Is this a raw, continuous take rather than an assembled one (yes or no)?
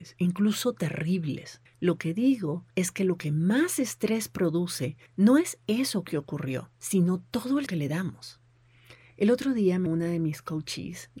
no